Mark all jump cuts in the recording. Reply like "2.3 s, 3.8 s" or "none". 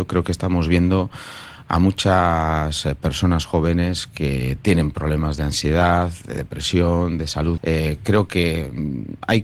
7.6 s